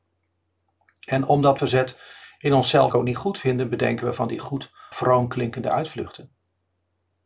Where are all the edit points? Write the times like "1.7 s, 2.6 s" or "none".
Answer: 1.6 s, 2.9 s, 4.9 s

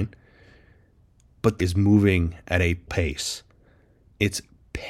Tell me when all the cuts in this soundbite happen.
1.6 s, 2.9 s

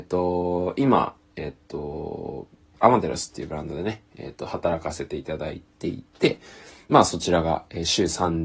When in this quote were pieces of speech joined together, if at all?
none

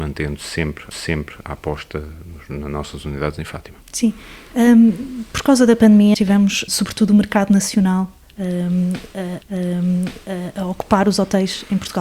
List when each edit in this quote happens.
0.9 s, 3.8 s, 6.1 s, 6.7 s, 9.4 s

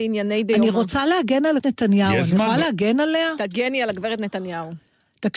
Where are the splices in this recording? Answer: 1.6 s

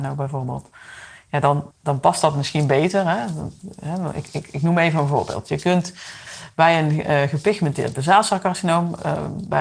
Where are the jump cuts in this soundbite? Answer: 1.7 s

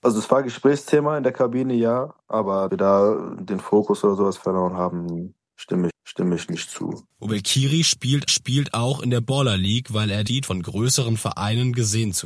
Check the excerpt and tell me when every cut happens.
2.7 s, 5.9 s, 8.3 s, 10.3 s

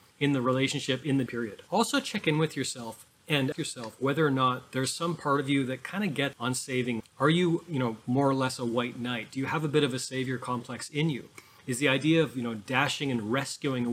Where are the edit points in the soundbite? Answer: 1.3 s, 3.5 s, 6.3 s, 7.0 s

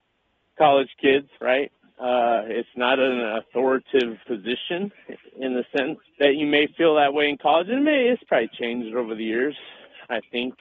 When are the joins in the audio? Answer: 1.3 s, 4.2 s, 6.1 s

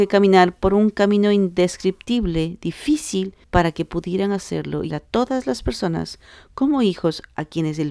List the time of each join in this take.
3.4 s, 4.9 s

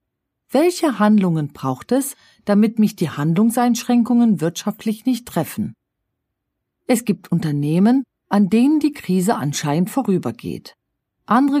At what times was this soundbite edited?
none

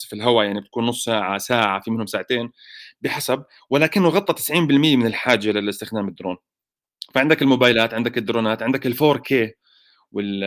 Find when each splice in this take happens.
none

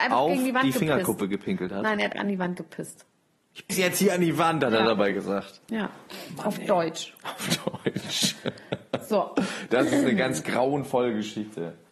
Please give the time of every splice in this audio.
2.1 s, 3.7 s

